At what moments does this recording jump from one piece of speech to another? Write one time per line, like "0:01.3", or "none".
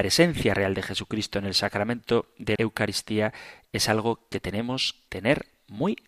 0:02.6
0:05.1